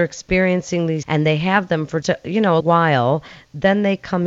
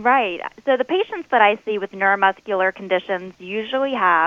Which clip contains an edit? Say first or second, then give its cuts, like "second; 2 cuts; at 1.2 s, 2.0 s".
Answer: first; 3 cuts; at 1.0 s, 2.0 s, 2.6 s